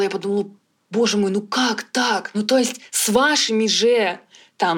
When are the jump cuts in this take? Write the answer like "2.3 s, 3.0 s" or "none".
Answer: none